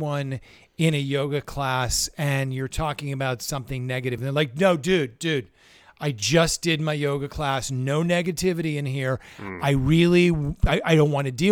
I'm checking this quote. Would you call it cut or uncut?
uncut